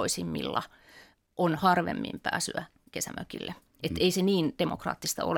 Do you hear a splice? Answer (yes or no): no